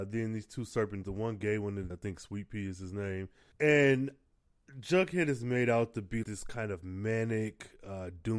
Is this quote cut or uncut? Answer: cut